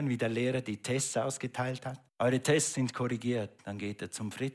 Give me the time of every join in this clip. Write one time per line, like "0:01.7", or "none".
0:02.1